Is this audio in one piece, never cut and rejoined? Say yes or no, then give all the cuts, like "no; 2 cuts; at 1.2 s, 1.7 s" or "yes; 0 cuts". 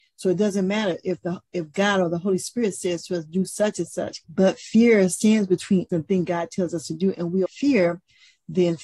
no; 3 cuts; at 4.2 s, 5.9 s, 7.5 s